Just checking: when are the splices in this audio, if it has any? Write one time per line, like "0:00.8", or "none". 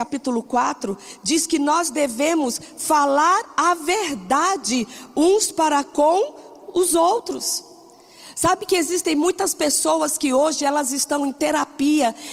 none